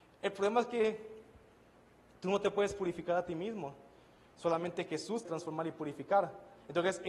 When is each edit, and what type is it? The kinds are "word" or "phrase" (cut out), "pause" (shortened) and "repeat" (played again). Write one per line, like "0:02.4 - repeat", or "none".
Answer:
0:05.3 - word